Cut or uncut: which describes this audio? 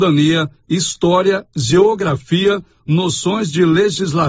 uncut